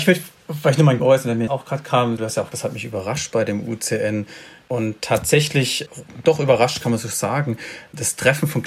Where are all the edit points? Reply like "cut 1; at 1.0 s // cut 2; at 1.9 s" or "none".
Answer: cut 1; at 1.0 s // cut 2; at 1.5 s // cut 3; at 2.5 s